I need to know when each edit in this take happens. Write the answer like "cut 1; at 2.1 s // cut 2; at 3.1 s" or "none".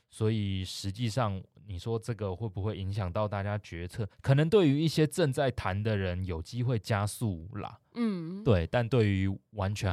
cut 1; at 4.1 s